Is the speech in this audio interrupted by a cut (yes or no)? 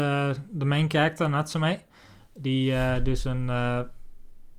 no